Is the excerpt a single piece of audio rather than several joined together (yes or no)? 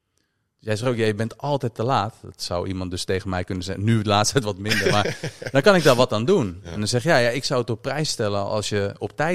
yes